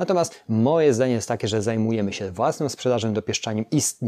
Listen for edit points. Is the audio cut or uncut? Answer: uncut